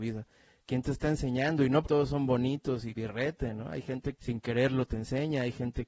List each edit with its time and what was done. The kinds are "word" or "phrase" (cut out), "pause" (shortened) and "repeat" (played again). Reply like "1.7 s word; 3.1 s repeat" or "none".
1.8 s word; 2.9 s word; 4.1 s word